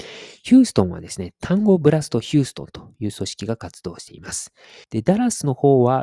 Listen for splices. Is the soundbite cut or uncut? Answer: cut